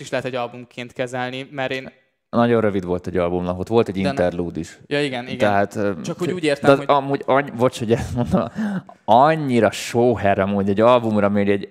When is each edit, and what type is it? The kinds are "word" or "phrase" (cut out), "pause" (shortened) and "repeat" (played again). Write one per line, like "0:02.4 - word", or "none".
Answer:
none